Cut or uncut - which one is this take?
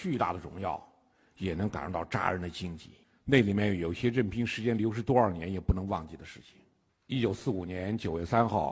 cut